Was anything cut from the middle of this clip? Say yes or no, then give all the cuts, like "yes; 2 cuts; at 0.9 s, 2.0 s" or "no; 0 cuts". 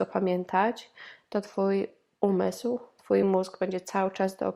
no; 0 cuts